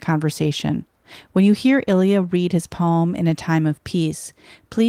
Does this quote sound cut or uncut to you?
uncut